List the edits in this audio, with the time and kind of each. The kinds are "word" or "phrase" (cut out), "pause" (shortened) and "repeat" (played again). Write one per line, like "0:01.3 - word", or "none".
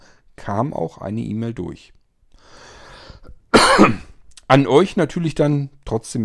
none